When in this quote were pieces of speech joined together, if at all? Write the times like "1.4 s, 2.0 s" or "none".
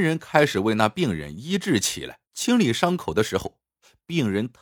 2.3 s